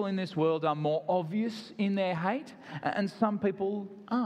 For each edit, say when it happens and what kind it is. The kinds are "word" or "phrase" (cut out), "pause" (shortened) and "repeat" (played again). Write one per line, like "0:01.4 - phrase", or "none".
none